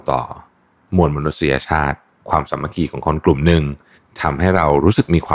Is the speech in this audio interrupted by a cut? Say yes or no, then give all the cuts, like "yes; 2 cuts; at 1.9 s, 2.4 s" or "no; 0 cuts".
yes; 1 cut; at 3.9 s